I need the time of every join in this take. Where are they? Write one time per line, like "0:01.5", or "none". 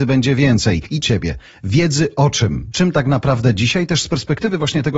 0:01.0